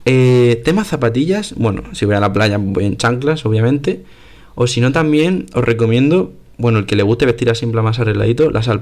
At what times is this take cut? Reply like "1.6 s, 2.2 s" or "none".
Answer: none